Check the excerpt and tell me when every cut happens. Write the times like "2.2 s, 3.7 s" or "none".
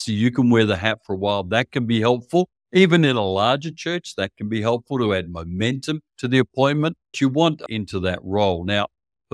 6.1 s, 7.1 s, 7.7 s